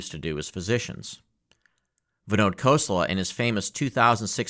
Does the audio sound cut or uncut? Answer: uncut